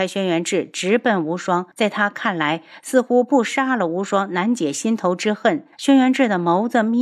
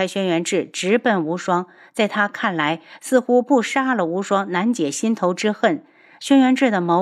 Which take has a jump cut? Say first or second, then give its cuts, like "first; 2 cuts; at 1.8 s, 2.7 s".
first; 2 cuts; at 1.7 s, 5.7 s